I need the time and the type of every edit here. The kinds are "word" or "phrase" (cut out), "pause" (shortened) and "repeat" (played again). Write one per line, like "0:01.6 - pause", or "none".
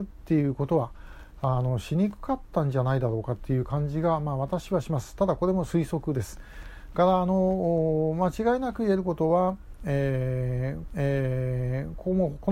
0:10.9 - repeat